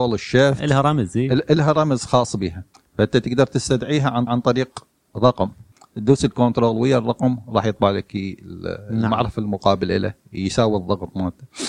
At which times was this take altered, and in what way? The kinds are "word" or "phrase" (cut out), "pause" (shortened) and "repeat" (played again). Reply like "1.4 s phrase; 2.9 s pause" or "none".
4.3 s repeat

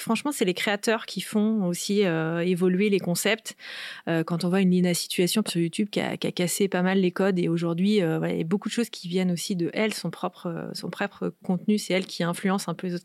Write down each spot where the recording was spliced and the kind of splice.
5.5 s word

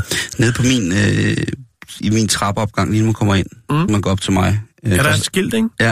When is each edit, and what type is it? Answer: 2.0 s word; 3.9 s word

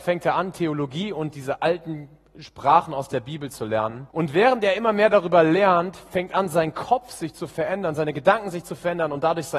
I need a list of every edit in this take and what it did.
4.1 s pause

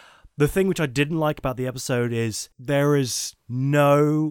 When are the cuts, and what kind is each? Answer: 2.5 s pause

